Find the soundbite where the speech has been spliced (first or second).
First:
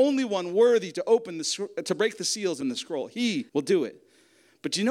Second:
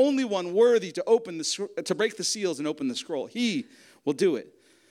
first